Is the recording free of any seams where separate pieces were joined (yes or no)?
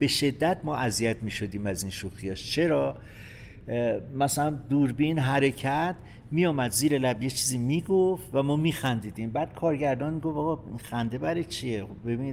yes